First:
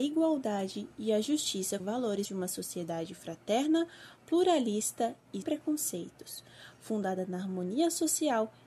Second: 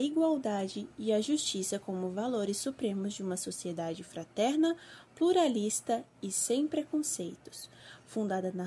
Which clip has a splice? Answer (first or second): first